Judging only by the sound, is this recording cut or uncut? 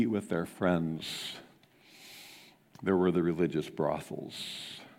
uncut